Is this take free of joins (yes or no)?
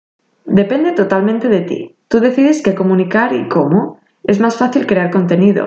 no